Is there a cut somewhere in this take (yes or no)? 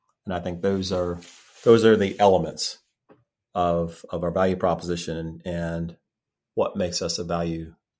no